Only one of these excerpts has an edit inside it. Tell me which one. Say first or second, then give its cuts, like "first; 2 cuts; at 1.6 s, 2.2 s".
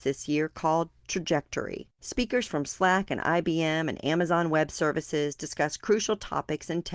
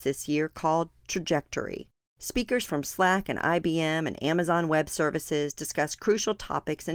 first; 1 cut; at 1.9 s